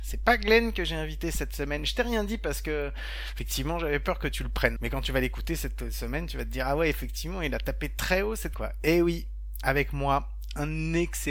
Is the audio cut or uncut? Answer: cut